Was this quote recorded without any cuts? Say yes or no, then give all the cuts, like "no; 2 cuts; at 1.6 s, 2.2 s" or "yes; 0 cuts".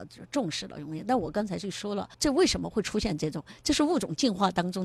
no; 1 cut; at 2.1 s